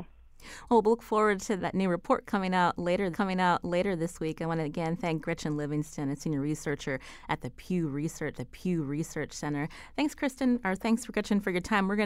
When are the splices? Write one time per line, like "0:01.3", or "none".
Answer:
0:01.6
0:03.1
0:08.3